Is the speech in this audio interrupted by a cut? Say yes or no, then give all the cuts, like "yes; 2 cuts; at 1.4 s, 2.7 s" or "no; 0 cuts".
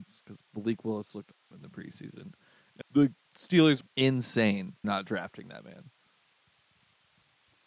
yes; 4 cuts; at 1.5 s, 2.8 s, 3.8 s, 4.8 s